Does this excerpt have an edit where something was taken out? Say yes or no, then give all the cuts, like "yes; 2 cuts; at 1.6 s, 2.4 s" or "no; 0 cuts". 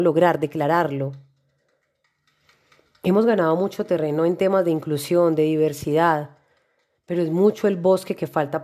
no; 0 cuts